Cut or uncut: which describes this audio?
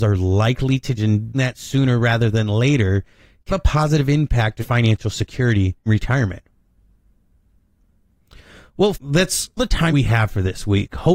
cut